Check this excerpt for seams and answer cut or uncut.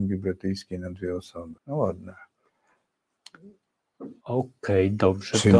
cut